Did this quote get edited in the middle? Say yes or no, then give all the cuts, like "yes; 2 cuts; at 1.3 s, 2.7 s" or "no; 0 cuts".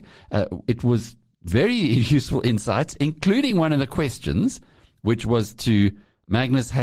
no; 0 cuts